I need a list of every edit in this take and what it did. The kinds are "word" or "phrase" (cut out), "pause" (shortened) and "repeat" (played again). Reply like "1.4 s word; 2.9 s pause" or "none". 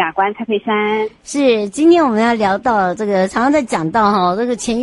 none